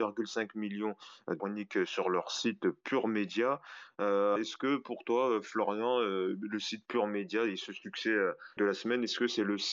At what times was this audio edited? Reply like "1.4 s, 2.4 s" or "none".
1.4 s, 4.4 s, 8.6 s